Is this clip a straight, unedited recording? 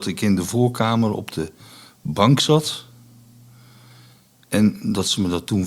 yes; 0 cuts

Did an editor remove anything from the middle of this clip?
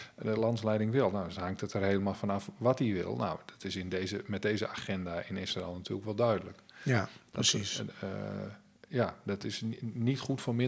no; 0 cuts

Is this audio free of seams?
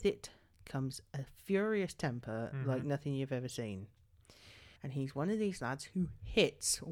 no; 1 cut; at 4.8 s

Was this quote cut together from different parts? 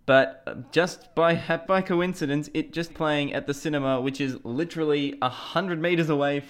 yes; 2 cuts; at 1.7 s, 2.9 s

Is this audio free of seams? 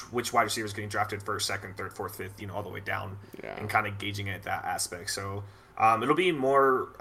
yes; 0 cuts

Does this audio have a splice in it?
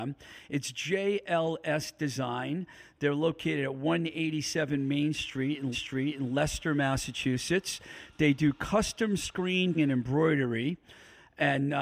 yes; 2 cuts; at 5.7 s, 9.7 s

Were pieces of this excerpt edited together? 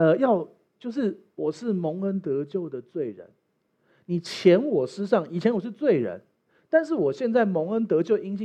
no; 0 cuts

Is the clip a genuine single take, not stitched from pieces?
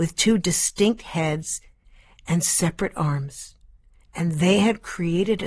yes; 0 cuts

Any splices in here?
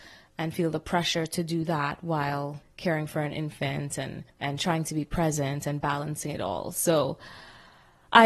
yes; 2 cuts; at 2.6 s, 4.3 s

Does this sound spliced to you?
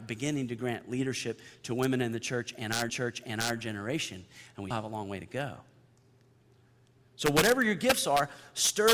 yes; 2 cuts; at 2.9 s, 4.7 s

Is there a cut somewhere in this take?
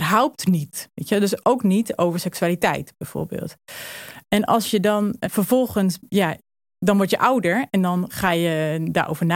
no; 0 cuts

